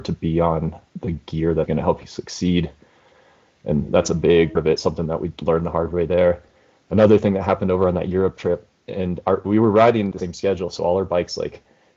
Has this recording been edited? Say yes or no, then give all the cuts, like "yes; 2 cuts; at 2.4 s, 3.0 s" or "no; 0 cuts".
yes; 3 cuts; at 1.7 s, 4.6 s, 10.1 s